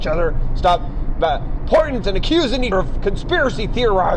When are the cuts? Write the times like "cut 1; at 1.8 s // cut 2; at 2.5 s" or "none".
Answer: cut 1; at 2.0 s // cut 2; at 2.7 s